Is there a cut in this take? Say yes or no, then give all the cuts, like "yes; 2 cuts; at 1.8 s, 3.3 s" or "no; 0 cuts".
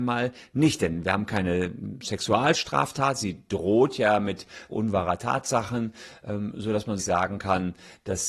yes; 2 cuts; at 4.7 s, 7.0 s